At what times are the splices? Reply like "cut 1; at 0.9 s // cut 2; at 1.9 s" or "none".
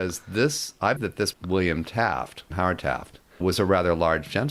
cut 1; at 1.0 s // cut 2; at 1.3 s // cut 3; at 2.5 s // cut 4; at 3.4 s